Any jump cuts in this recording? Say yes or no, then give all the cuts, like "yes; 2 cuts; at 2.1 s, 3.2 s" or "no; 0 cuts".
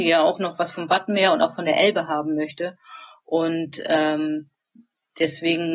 no; 0 cuts